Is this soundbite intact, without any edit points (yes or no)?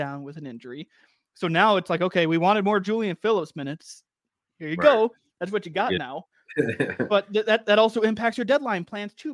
yes